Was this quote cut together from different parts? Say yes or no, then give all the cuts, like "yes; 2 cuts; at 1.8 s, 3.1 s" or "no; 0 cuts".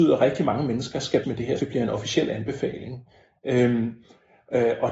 yes; 2 cuts; at 1.2 s, 1.6 s